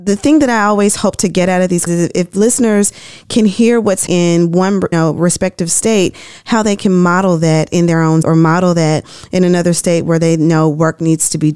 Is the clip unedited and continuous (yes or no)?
no